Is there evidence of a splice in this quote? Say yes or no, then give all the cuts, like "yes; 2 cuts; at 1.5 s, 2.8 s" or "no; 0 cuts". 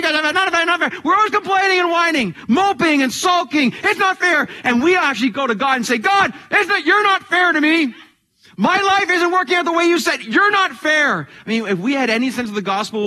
no; 0 cuts